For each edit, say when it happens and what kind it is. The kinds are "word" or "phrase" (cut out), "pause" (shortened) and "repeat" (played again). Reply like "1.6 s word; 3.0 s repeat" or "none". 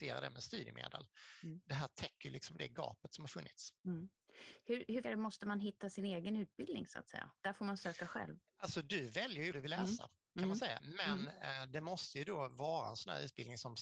5.0 s word; 7.4 s pause; 8.5 s pause; 9.5 s phrase